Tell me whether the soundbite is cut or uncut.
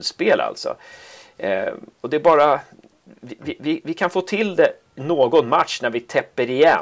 uncut